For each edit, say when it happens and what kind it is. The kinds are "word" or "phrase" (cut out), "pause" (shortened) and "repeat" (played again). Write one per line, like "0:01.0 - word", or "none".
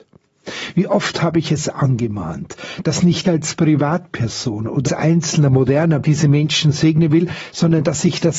0:03.2 - word
0:04.9 - word
0:06.0 - word